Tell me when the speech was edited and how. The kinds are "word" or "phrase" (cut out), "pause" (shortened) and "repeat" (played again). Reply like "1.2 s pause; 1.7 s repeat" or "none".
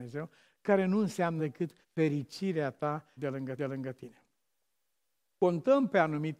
1.4 s word; 1.8 s pause; 3.2 s phrase; 3.6 s repeat